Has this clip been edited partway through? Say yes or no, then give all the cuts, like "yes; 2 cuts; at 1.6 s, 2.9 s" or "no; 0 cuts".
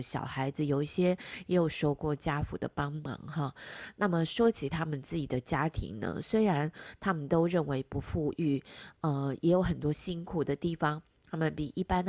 no; 0 cuts